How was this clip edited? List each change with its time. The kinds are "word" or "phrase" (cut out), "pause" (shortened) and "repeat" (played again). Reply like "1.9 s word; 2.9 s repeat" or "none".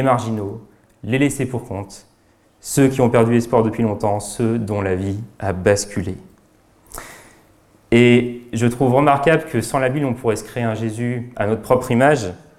none